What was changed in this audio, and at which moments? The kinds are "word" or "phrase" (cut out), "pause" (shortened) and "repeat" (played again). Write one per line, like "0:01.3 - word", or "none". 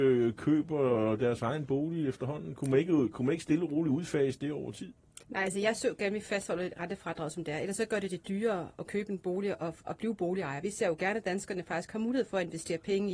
0:05.2 - pause